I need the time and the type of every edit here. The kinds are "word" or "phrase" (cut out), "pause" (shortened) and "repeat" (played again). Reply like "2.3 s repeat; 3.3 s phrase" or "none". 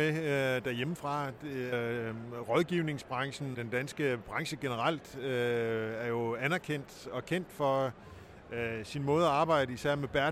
1.7 s word; 3.5 s word